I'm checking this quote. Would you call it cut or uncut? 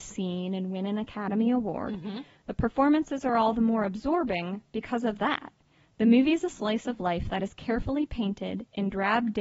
uncut